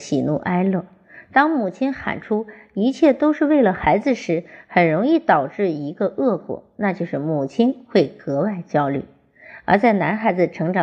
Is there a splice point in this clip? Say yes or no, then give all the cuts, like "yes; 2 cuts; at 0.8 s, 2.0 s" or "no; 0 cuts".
no; 0 cuts